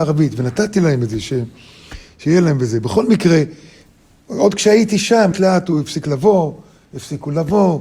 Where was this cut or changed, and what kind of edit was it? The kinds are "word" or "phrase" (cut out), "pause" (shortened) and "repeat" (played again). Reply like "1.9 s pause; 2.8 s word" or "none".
5.3 s word